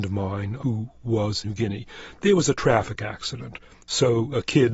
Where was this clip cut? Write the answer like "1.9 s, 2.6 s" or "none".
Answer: 1.4 s